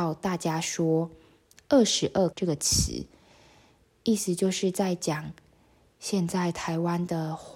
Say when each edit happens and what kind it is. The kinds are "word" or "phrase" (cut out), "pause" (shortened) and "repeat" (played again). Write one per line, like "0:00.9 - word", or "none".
0:02.3 - word